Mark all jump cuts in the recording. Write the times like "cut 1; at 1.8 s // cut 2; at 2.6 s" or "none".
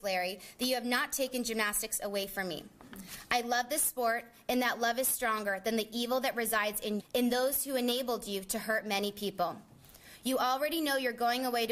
cut 1; at 7.0 s